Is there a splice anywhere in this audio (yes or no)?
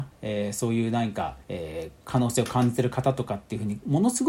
yes